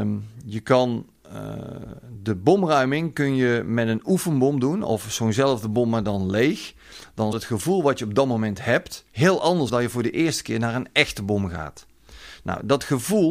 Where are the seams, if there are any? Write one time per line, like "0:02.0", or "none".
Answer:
0:07.3
0:09.1
0:09.7